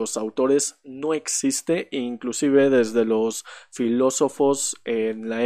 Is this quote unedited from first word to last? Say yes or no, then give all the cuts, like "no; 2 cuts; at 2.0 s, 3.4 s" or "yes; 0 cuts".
yes; 0 cuts